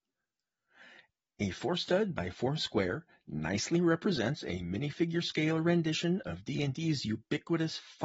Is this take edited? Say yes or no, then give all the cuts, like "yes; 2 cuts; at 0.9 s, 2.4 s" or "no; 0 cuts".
yes; 1 cut; at 2.6 s